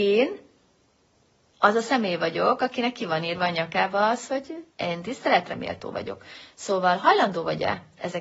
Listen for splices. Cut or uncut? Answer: cut